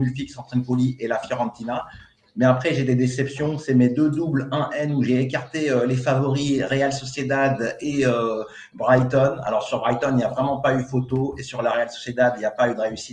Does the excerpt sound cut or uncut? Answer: uncut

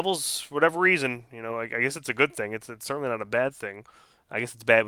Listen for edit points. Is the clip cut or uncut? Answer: uncut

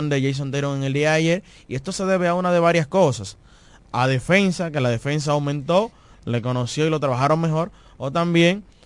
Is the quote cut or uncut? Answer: uncut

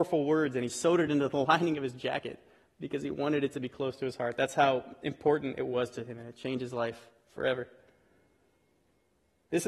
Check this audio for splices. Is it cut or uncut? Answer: uncut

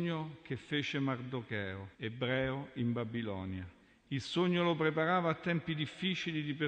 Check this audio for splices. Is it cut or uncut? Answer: cut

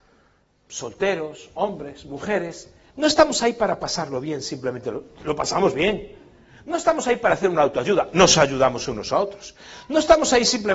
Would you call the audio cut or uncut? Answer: uncut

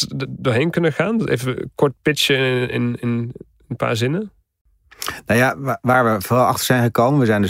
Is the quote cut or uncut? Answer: uncut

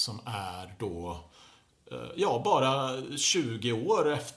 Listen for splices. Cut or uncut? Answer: uncut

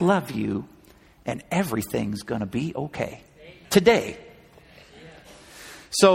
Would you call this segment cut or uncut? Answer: cut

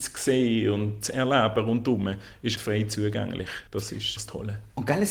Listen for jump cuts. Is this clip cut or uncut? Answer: cut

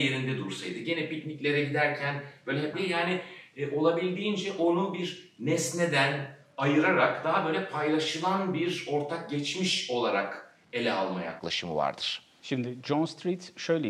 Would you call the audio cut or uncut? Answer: cut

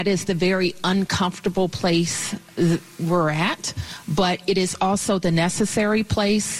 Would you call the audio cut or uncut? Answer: uncut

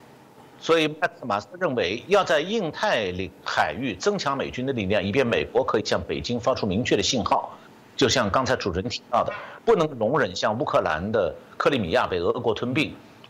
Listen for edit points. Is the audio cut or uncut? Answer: uncut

